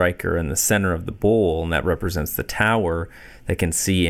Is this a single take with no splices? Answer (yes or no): yes